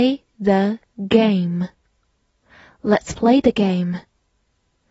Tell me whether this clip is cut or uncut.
uncut